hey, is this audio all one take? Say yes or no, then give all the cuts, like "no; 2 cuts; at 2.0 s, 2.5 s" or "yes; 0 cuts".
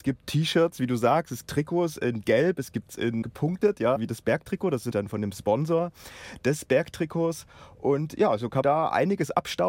no; 6 cuts; at 1.4 s, 2.9 s, 3.2 s, 4.0 s, 4.9 s, 8.6 s